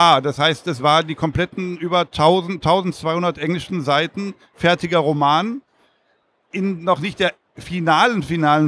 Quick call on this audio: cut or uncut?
uncut